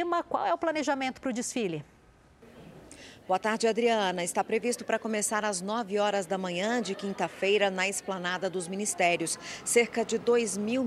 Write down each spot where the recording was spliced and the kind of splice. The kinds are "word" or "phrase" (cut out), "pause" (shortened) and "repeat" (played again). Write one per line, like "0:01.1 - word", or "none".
none